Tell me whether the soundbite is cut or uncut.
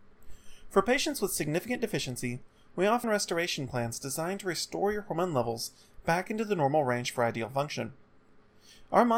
cut